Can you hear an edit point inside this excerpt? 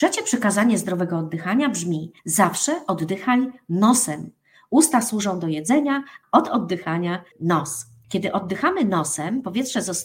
yes; 3 cuts; at 2.2 s, 6.2 s, 7.3 s

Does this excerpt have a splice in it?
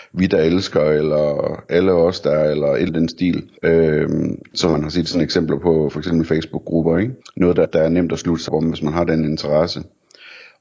yes; 5 cuts; at 2.9 s, 3.6 s, 7.2 s, 7.6 s, 8.5 s

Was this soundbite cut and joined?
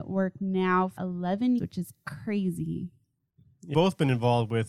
yes; 3 cuts; at 1.0 s, 1.6 s, 3.7 s

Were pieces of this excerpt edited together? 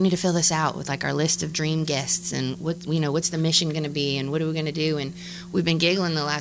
no; 0 cuts

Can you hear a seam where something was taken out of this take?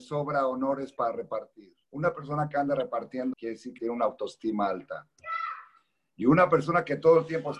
yes; 3 cuts; at 1.8 s, 3.3 s, 3.8 s

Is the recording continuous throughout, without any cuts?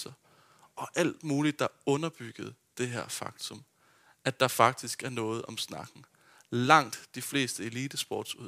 yes; 0 cuts

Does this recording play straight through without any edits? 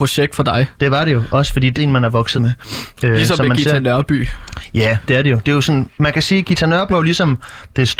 no; 3 cuts; at 1.7 s, 2.3 s, 6.9 s

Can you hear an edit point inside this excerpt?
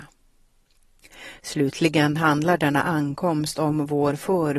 no; 0 cuts

